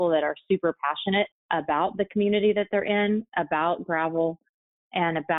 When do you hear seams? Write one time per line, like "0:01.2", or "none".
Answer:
0:01.3